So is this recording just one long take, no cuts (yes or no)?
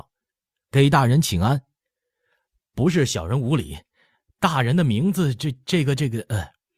yes